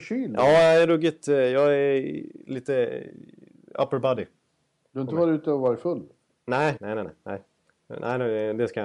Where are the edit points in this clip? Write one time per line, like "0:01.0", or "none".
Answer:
0:06.8